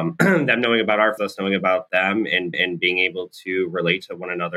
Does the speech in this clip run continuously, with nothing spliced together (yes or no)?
no